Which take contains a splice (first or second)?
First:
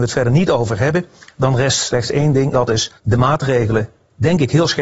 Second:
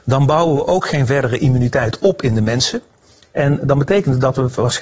first